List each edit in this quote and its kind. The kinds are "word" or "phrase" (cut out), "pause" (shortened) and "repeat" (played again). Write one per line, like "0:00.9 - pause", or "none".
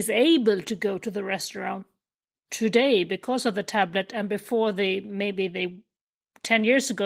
none